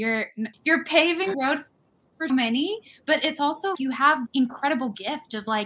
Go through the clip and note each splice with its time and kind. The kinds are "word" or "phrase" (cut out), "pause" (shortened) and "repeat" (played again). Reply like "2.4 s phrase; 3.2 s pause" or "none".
1.3 s word; 2.3 s word; 3.7 s word; 4.3 s word